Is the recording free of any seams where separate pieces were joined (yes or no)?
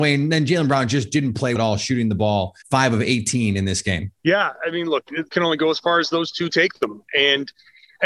no